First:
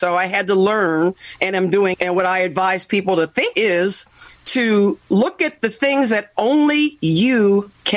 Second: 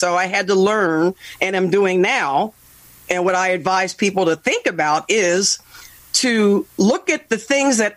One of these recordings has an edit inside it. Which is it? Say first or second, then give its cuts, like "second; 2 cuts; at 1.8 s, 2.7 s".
first; 3 cuts; at 1.9 s, 3.5 s, 4.3 s